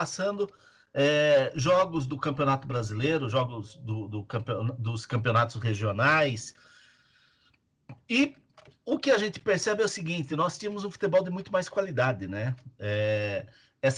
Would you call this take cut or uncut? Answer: uncut